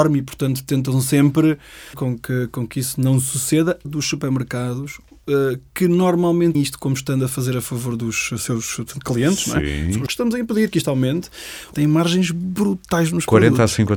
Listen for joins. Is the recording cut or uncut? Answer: cut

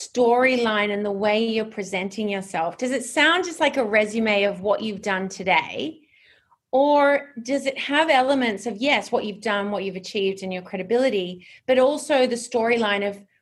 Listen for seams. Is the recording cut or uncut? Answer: uncut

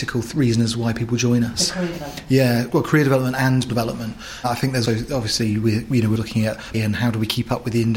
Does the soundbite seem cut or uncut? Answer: cut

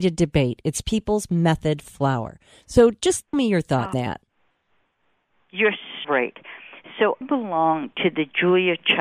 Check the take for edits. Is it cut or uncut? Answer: cut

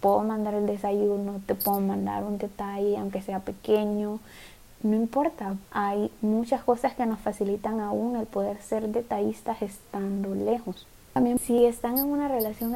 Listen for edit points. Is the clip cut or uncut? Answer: cut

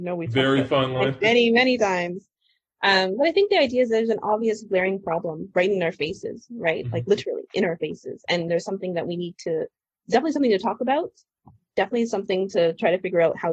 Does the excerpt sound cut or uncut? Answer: uncut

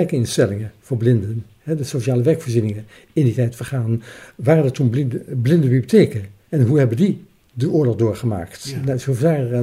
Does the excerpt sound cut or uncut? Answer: uncut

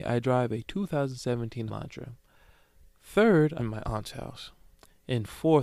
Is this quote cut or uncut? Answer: cut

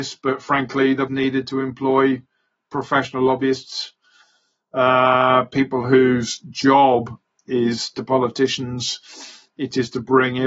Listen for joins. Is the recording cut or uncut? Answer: cut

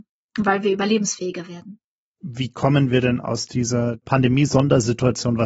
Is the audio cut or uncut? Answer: uncut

